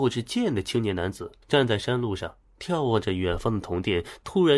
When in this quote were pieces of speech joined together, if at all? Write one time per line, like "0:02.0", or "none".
0:01.4

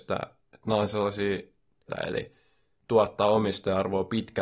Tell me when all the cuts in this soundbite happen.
0:01.9

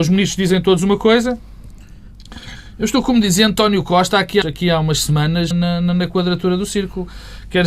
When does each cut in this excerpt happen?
0:04.4
0:05.5

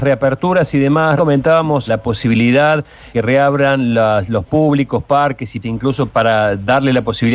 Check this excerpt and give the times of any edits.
0:01.2
0:01.9
0:03.1
0:04.5
0:05.6
0:06.1

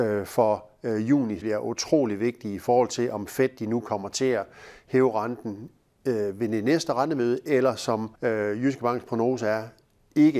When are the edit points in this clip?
0:01.4
0:08.1

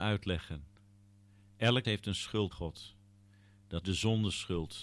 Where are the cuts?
0:01.8
0:02.5
0:03.8

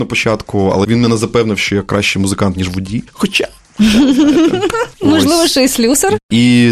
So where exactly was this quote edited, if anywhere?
none

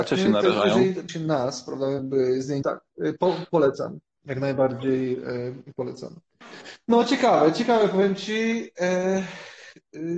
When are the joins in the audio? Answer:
0:01.1
0:02.0
0:02.6

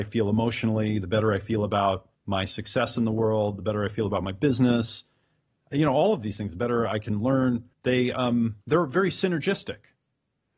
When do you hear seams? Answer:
0:02.1
0:07.7
0:08.6

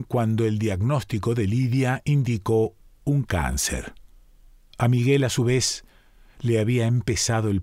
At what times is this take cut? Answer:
none

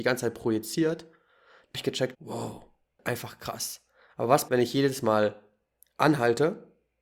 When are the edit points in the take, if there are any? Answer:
0:01.7
0:02.1
0:04.5

